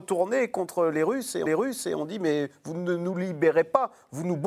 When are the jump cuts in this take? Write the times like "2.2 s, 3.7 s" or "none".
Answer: 1.5 s